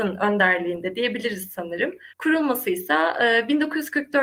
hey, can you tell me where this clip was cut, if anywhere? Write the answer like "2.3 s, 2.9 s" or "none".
2.1 s